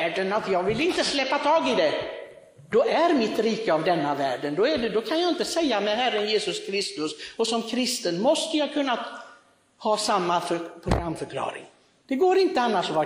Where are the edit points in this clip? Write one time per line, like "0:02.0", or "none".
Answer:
none